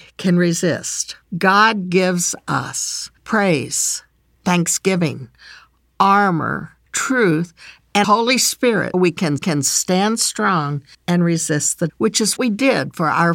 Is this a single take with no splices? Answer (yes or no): no